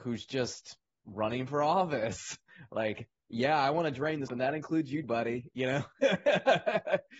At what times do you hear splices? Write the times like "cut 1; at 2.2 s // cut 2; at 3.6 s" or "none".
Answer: cut 1; at 4.3 s // cut 2; at 5.0 s